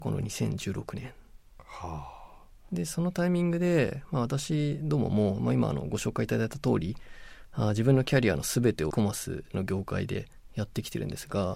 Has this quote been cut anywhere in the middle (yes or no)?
yes